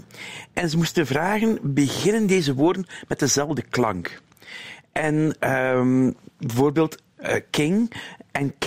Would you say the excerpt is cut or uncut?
uncut